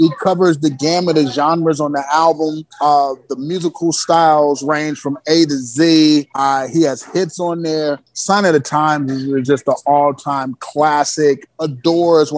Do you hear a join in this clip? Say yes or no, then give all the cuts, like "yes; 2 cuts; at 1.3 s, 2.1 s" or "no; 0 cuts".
no; 0 cuts